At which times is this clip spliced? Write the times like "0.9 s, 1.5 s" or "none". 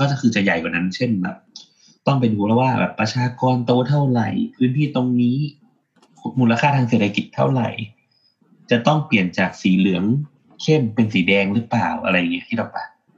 none